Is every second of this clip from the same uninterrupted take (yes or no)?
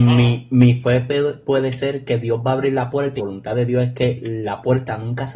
no